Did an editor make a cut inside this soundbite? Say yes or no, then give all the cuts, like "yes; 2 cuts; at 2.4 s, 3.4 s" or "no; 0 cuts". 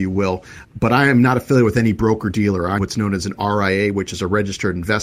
yes; 1 cut; at 2.8 s